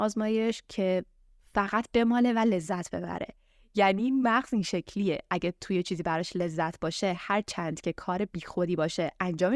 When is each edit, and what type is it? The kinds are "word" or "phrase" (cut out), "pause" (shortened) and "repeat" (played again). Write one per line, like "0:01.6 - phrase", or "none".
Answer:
none